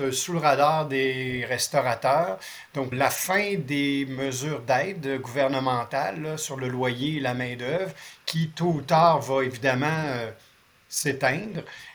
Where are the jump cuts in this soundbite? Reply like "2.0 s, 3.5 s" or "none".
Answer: 2.9 s